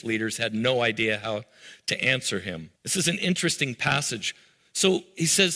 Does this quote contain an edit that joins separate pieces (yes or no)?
yes